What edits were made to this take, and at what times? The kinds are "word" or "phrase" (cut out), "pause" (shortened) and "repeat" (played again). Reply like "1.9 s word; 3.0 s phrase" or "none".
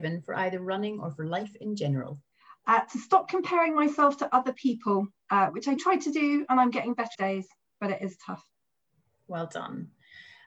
2.3 s pause; 5.2 s pause; 5.8 s word; 7.1 s phrase